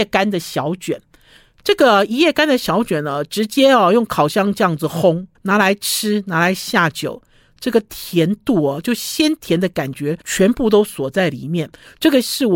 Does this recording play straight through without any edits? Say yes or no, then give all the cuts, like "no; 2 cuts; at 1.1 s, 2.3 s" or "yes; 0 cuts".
no; 2 cuts; at 5.3 s, 10.2 s